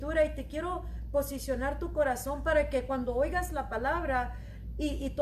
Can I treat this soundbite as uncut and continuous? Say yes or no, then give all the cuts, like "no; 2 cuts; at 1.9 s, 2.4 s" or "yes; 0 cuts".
yes; 0 cuts